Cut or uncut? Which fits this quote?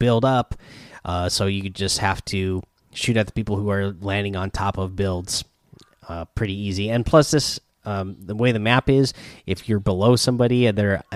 uncut